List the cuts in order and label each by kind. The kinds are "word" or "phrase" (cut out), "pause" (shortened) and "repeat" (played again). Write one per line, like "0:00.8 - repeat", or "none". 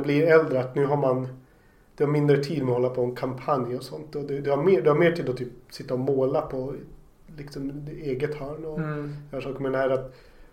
none